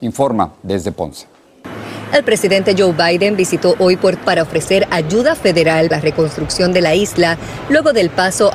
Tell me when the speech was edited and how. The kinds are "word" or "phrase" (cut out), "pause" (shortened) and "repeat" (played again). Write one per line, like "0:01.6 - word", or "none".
0:04.2 - word
0:05.9 - word